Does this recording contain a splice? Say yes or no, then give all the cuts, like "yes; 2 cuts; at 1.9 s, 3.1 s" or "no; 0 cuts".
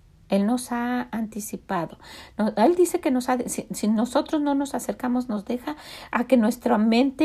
no; 0 cuts